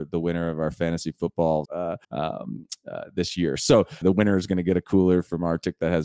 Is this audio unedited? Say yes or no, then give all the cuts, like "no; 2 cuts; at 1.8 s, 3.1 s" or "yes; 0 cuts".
no; 3 cuts; at 1.6 s, 2.0 s, 4.0 s